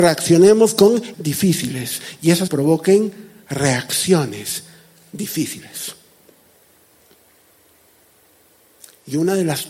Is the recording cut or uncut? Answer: cut